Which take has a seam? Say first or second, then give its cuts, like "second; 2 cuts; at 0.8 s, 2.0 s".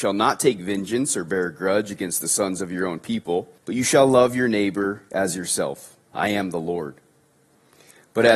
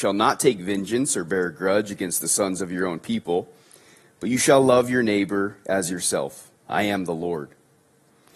first; 1 cut; at 3.6 s